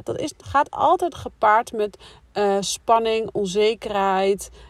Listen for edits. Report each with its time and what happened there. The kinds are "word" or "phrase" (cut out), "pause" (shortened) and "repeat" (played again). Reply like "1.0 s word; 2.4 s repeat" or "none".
none